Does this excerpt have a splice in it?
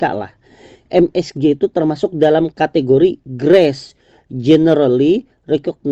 no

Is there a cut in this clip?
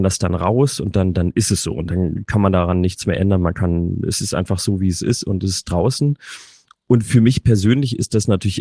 no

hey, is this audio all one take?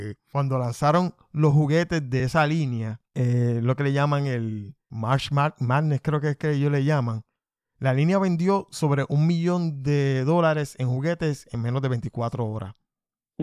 yes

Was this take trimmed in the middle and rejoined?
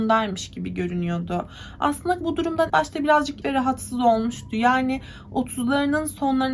yes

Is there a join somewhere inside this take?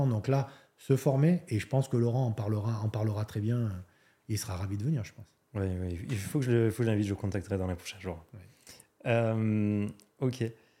no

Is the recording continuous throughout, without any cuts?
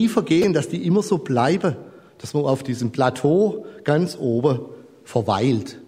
yes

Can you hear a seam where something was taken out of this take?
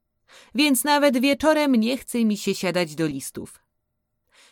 no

